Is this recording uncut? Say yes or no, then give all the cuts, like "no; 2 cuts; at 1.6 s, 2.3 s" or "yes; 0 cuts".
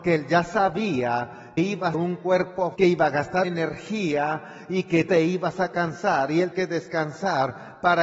no; 6 cuts; at 1.6 s, 1.9 s, 2.8 s, 3.4 s, 5.1 s, 6.5 s